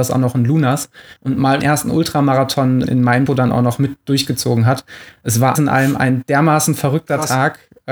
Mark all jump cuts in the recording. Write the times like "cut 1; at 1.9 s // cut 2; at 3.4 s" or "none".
cut 1; at 1.2 s // cut 2; at 1.6 s // cut 3; at 2.8 s // cut 4; at 3.3 s // cut 5; at 5.6 s